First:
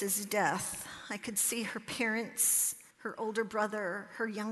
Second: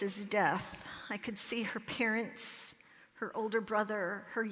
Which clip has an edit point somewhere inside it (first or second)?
first